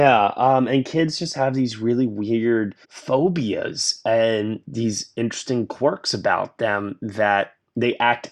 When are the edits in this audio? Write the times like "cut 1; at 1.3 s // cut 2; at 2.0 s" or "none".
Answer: cut 1; at 2.8 s